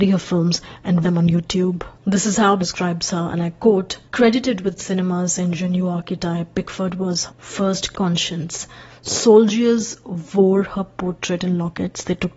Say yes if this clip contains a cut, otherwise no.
yes